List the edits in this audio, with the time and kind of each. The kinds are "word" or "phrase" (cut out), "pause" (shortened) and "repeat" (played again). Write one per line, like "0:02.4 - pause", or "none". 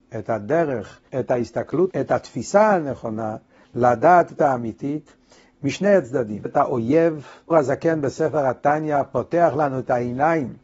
0:01.1 - pause
0:01.9 - word
0:04.4 - word
0:06.5 - word
0:07.5 - word